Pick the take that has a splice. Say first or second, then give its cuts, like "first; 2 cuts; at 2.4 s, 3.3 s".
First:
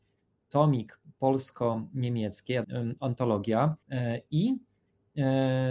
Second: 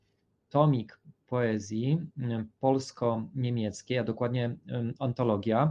first; 3 cuts; at 1.2 s, 2.6 s, 3.8 s